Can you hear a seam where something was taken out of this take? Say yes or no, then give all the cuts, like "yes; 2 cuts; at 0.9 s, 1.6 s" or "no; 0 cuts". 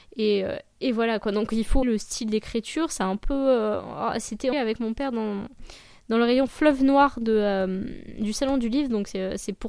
yes; 2 cuts; at 1.8 s, 4.5 s